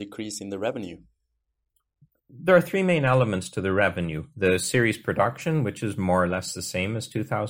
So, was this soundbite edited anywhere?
no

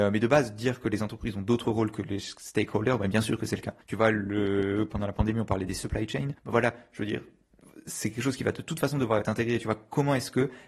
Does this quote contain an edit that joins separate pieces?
yes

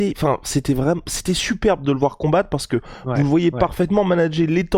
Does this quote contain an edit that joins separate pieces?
no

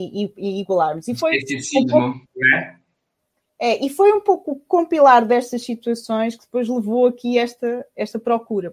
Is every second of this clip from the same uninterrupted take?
yes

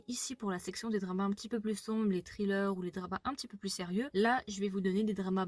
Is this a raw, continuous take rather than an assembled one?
yes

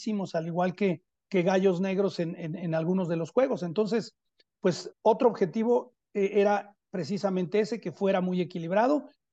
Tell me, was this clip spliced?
yes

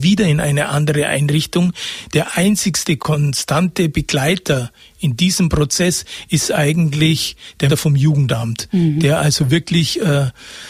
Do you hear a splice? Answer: yes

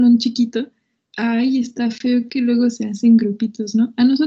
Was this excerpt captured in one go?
yes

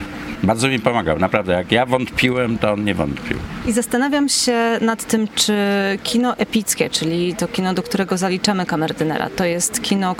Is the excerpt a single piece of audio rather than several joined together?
yes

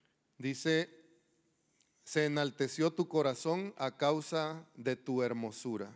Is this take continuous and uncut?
yes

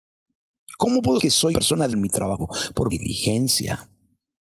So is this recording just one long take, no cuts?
no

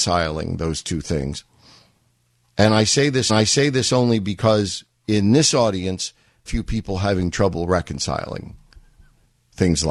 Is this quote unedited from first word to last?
no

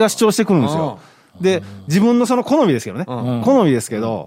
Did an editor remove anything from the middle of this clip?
no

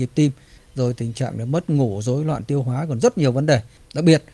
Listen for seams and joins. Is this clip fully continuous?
yes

